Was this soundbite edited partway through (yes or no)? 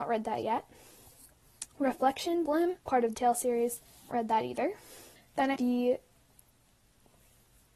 yes